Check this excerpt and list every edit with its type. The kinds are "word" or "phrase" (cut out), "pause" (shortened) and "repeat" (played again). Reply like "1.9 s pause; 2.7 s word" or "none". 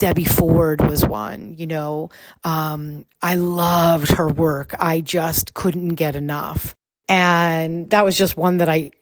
none